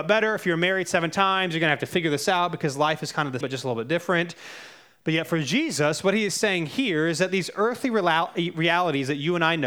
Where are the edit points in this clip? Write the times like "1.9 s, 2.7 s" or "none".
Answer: 3.4 s